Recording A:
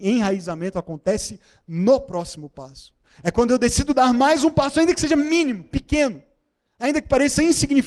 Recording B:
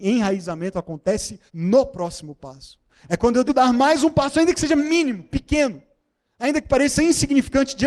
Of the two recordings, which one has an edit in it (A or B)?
B